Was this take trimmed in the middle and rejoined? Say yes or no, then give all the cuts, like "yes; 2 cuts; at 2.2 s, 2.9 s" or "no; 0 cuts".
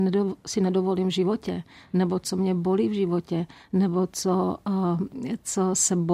no; 0 cuts